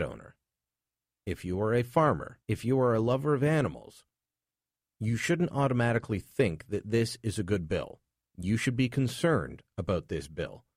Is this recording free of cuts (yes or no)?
no